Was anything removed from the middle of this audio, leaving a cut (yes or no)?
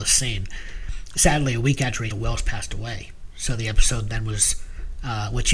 yes